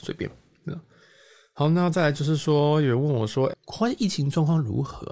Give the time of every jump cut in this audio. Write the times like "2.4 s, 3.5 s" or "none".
3.5 s